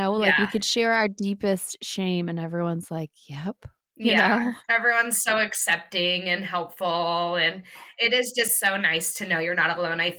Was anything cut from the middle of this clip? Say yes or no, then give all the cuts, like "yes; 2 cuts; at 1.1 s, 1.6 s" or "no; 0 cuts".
yes; 1 cut; at 4.6 s